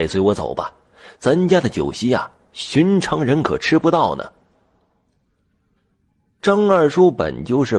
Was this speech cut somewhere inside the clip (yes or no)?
no